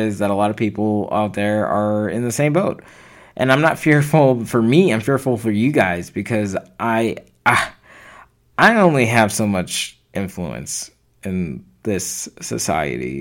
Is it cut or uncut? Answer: uncut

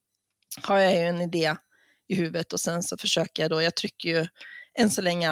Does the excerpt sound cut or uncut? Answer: uncut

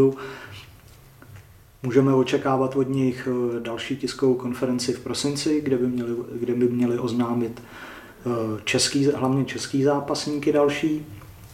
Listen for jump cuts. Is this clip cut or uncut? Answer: uncut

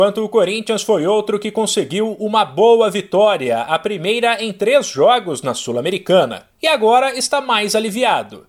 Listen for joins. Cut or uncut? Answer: cut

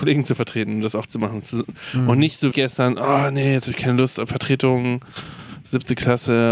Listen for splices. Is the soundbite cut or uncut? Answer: cut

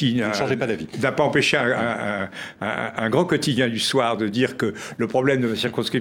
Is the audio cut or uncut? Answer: uncut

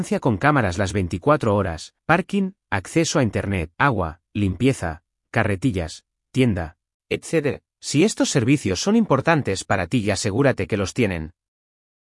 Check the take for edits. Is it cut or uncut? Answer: cut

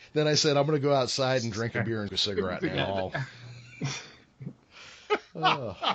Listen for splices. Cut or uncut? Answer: cut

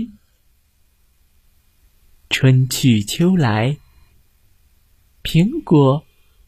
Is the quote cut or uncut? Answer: uncut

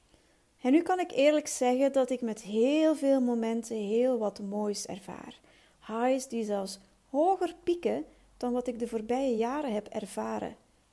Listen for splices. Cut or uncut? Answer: uncut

